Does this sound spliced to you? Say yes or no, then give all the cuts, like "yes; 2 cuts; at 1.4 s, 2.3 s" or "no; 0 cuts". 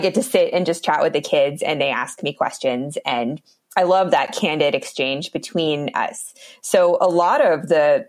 no; 0 cuts